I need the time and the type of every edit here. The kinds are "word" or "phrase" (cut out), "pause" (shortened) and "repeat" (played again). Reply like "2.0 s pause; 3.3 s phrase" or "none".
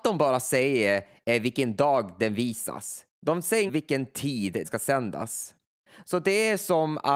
3.7 s word; 4.6 s word